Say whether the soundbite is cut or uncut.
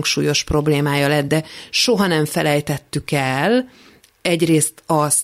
uncut